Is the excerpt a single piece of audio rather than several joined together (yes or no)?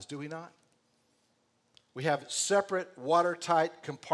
yes